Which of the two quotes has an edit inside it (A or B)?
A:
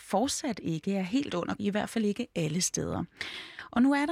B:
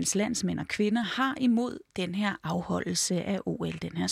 A